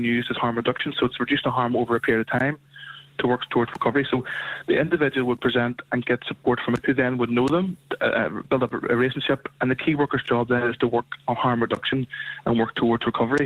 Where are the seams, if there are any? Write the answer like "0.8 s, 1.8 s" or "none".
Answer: 6.8 s

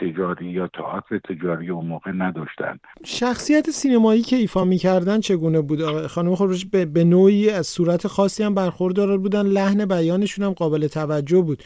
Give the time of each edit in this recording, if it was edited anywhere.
none

